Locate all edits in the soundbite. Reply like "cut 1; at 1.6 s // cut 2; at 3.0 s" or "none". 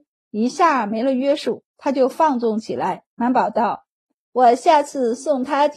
cut 1; at 1.7 s // cut 2; at 3.1 s